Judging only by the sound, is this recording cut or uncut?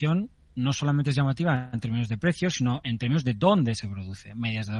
uncut